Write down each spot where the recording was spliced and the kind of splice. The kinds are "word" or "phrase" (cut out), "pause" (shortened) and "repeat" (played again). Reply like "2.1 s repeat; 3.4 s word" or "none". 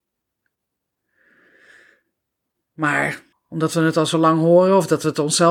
3.3 s pause